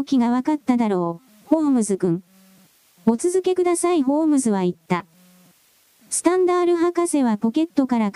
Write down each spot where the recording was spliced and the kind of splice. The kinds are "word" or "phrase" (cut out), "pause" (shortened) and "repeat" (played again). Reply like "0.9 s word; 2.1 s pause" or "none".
none